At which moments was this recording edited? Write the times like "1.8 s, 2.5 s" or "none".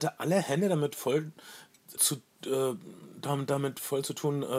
2.0 s